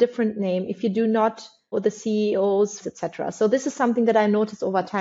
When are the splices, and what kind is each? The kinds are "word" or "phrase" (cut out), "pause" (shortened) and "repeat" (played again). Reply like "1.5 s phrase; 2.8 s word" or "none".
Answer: 1.7 s word; 2.8 s word